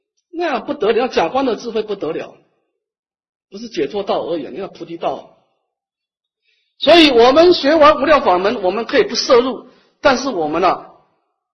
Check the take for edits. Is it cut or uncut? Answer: uncut